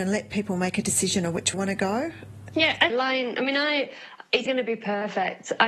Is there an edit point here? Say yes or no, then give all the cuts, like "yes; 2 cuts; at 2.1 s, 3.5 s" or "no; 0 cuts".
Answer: yes; 3 cuts; at 1.5 s, 2.9 s, 4.5 s